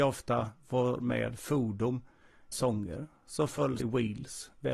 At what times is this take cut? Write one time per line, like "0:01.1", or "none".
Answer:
0:02.5
0:03.8